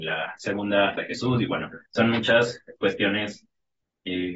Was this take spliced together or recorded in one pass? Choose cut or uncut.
cut